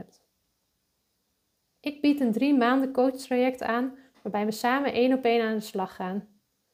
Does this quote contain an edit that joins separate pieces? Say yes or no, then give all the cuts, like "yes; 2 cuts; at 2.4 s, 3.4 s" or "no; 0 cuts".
no; 0 cuts